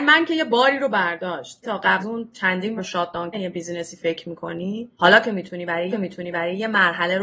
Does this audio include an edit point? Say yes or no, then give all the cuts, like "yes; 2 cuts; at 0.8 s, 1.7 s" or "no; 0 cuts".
yes; 6 cuts; at 1.6 s, 2.0 s, 2.8 s, 3.3 s, 4.9 s, 5.9 s